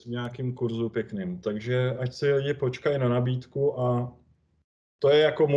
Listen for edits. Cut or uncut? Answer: uncut